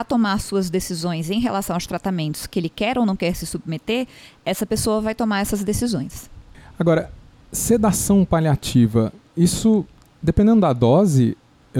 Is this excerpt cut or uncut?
uncut